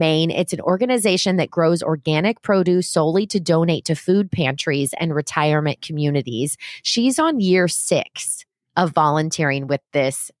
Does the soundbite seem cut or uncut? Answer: uncut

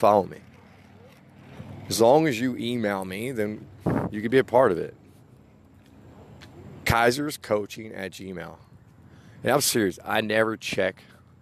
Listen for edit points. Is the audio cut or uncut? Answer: uncut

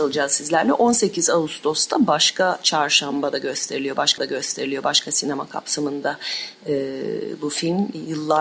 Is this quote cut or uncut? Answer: cut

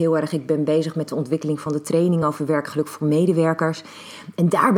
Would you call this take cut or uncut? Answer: uncut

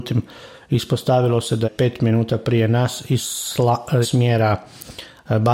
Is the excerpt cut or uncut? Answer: cut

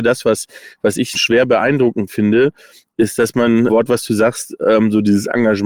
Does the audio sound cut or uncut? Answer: cut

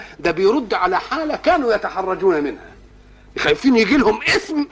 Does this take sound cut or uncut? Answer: uncut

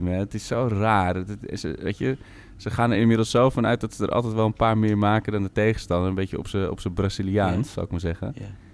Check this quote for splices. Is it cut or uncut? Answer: uncut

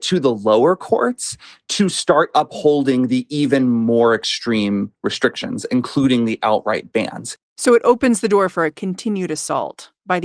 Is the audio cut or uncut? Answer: uncut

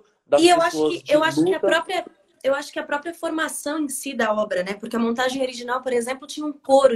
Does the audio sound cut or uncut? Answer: uncut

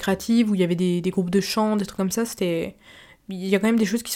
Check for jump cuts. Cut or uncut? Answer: uncut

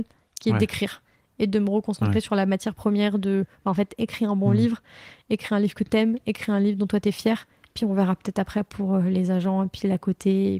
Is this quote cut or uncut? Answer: uncut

